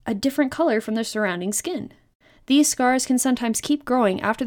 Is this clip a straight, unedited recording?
yes; 0 cuts

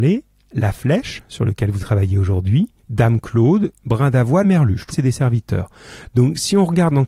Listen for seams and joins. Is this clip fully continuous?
no; 4 cuts; at 1.8 s, 2.8 s, 4.4 s, 4.9 s

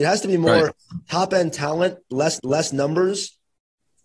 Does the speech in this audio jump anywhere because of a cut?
yes; 1 cut; at 2.4 s

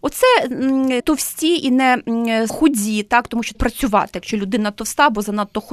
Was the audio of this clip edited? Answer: yes; 3 cuts; at 1.0 s, 2.5 s, 3.5 s

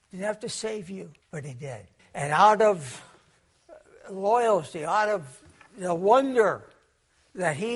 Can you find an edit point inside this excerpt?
yes; 2 cuts; at 1.2 s, 2.0 s

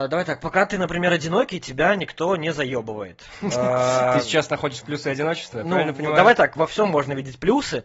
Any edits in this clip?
no; 0 cuts

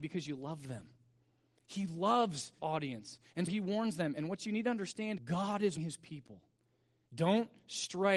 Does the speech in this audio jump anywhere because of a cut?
yes; 4 cuts; at 2.6 s, 3.5 s, 5.2 s, 5.8 s

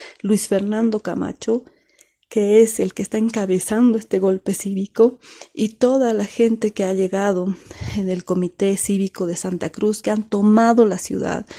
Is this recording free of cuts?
yes; 0 cuts

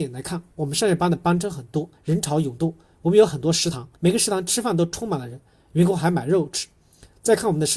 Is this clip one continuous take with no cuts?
no; 2 cuts; at 2.0 s, 4.0 s

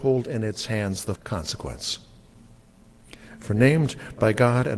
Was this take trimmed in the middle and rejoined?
yes; 1 cut; at 1.2 s

